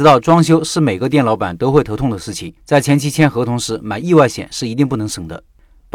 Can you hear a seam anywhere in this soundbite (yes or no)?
yes